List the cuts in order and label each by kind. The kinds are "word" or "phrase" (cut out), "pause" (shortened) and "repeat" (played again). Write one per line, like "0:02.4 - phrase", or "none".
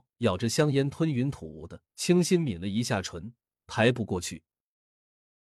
0:01.9 - pause

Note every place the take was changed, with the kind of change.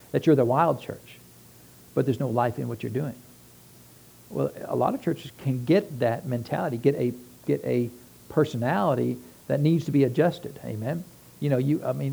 none

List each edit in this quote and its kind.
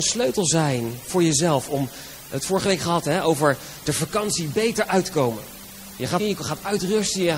0:06.2 - phrase

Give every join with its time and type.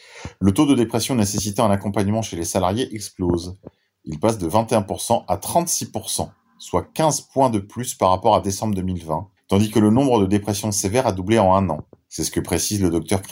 none

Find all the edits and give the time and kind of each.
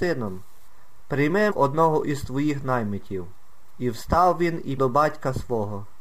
0:01.5 - phrase
0:04.8 - word

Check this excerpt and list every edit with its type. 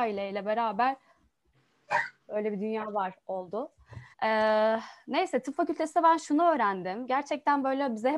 0:04.1 - pause

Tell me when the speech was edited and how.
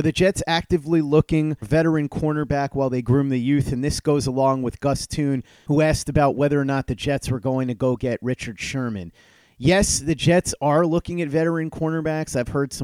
0:01.6 - word

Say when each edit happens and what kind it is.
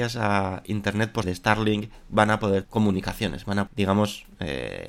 0:01.2 - word
0:02.6 - word
0:03.7 - word

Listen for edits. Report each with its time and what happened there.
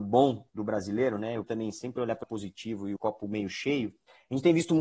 0:01.4 - word
0:02.2 - word
0:03.0 - word

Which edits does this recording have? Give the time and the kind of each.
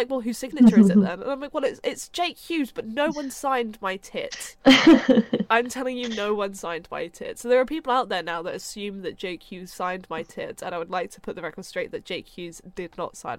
none

